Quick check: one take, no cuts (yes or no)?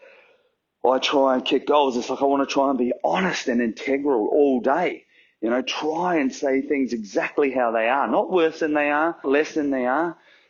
no